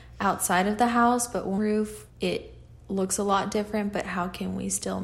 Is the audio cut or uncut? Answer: cut